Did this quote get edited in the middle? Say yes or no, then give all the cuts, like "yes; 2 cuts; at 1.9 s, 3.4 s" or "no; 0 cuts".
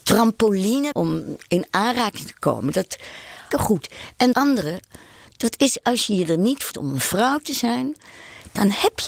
yes; 4 cuts; at 0.9 s, 3.5 s, 4.3 s, 6.7 s